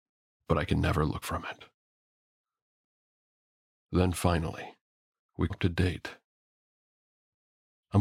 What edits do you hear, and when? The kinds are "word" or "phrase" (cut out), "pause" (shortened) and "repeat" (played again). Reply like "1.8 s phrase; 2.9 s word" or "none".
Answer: 1.2 s word; 5.5 s word